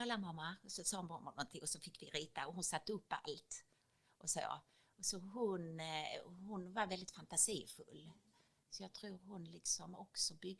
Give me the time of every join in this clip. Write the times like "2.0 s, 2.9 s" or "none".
none